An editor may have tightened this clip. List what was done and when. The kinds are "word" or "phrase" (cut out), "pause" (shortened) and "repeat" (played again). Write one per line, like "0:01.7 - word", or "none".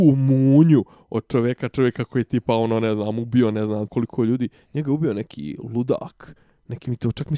0:03.9 - word